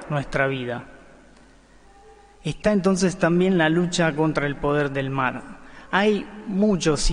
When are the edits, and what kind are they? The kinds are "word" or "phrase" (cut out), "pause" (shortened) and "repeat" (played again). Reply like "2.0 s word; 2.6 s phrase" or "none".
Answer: none